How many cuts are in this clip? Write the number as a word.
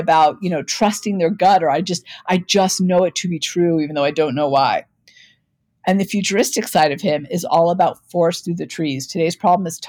zero